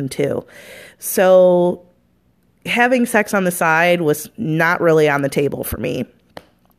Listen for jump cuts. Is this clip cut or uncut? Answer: uncut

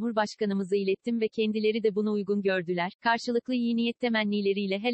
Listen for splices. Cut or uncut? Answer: uncut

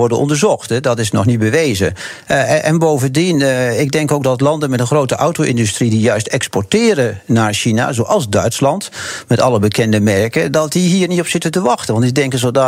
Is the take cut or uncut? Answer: uncut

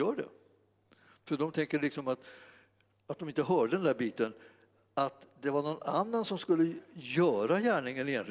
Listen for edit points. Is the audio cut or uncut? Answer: uncut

